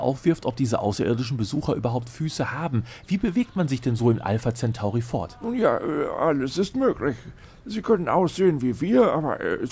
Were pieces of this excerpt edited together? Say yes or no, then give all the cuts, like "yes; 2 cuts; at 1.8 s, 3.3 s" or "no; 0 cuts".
no; 0 cuts